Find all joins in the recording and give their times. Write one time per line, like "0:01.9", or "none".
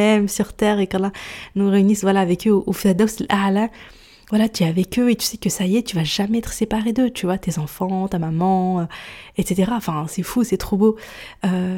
none